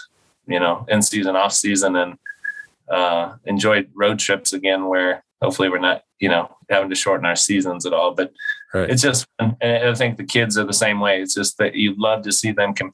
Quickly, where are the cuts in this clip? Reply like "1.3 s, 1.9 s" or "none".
5.3 s, 6.1 s, 6.6 s